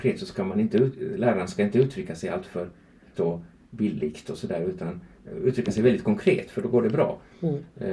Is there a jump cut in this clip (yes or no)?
yes